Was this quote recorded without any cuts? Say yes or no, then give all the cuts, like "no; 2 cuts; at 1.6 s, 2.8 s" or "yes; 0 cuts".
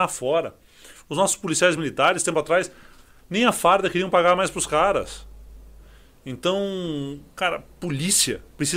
yes; 0 cuts